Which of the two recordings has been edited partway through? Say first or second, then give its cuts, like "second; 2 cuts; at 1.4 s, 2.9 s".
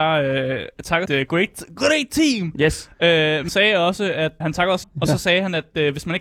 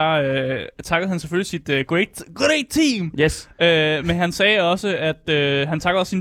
first; 4 cuts; at 1.1 s, 3.5 s, 4.4 s, 4.8 s